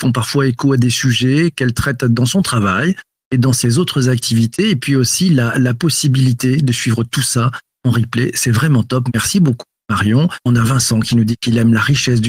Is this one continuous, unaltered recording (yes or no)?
yes